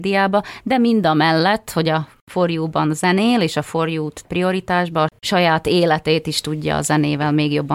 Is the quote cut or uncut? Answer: cut